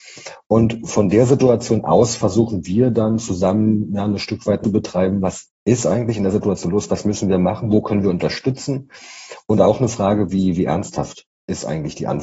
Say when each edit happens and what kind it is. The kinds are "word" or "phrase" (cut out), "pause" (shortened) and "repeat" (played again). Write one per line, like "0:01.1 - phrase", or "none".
0:04.6 - phrase
0:05.5 - pause